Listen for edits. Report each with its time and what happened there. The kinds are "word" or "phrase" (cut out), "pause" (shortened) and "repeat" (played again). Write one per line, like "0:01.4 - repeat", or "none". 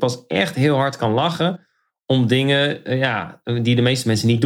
none

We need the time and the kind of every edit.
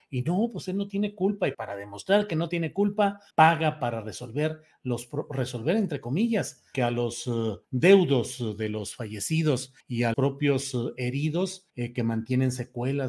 0:01.5 - word
0:03.3 - pause
0:06.7 - word
0:07.6 - pause
0:09.8 - pause
0:10.1 - word
0:11.7 - pause

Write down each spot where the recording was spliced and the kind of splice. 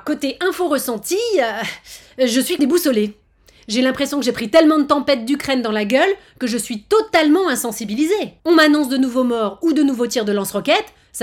0:02.6 - word
0:08.4 - pause

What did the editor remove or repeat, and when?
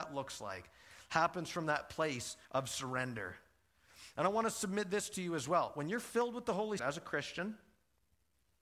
0:02.4 - pause
0:06.8 - word

